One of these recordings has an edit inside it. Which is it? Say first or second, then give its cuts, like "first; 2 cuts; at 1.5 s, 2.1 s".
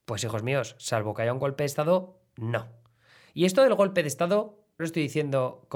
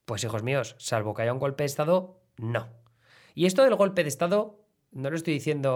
first; 1 cut; at 4.8 s